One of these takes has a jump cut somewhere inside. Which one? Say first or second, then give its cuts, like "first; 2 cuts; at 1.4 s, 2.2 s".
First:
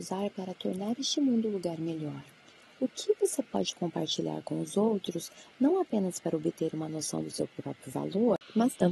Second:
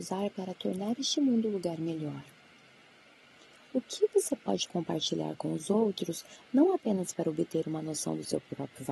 first; 1 cut; at 2.5 s